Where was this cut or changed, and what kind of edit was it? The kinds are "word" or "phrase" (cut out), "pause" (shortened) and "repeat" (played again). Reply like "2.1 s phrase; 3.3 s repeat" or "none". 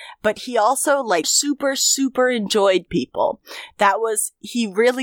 1.2 s word; 2.9 s word